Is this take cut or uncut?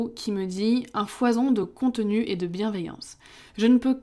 uncut